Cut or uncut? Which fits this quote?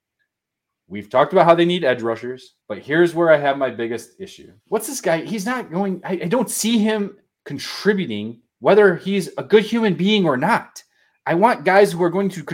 cut